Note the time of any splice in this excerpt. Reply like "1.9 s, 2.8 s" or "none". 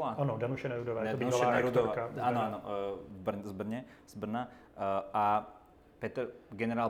none